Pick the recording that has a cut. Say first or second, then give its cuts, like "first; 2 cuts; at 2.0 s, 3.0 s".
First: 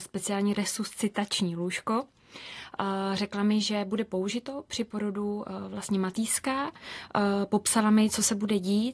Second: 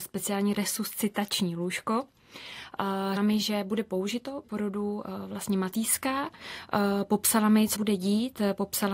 second; 3 cuts; at 3.2 s, 4.4 s, 7.7 s